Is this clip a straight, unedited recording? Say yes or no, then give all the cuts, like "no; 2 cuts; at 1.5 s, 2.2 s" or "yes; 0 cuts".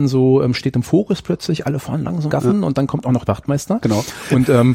no; 2 cuts; at 2.3 s, 3.3 s